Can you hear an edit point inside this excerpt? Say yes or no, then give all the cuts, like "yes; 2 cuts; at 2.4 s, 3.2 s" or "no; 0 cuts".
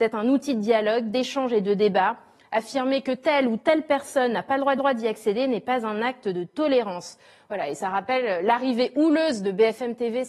yes; 1 cut; at 4.8 s